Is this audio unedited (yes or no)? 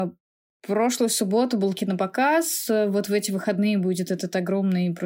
yes